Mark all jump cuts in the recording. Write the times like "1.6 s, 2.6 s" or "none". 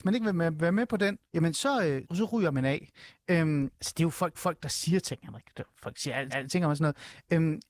1.2 s, 2.0 s, 3.7 s, 4.3 s, 6.3 s